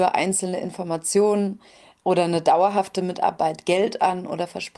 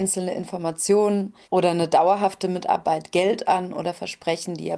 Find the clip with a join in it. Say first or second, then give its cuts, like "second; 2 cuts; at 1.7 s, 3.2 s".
second; 1 cut; at 1.4 s